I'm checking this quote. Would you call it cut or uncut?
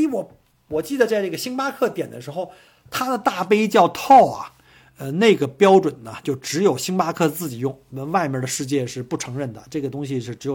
uncut